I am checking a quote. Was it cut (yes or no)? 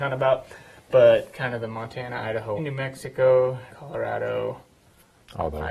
yes